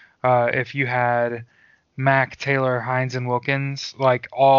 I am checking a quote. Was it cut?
no; 0 cuts

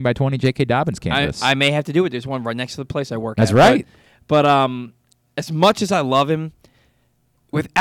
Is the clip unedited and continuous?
yes; 0 cuts

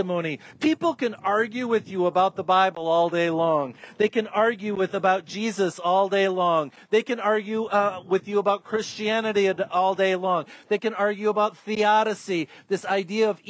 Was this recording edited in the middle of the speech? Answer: no; 0 cuts

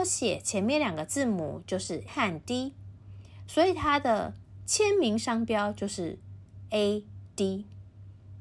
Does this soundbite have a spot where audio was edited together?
yes; 1 cut; at 2.1 s

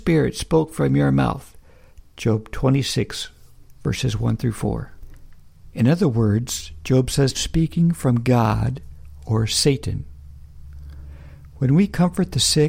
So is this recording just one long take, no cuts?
no; 1 cut; at 7.3 s

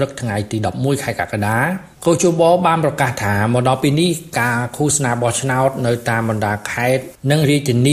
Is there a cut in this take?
yes; 1 cut; at 1.9 s

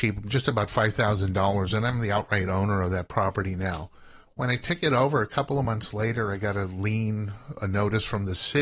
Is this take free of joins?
yes; 0 cuts

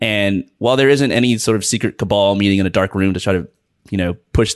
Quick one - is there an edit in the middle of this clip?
no; 0 cuts

